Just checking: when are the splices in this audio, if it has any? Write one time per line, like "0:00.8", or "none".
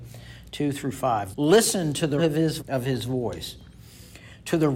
0:01.3
0:02.2
0:02.6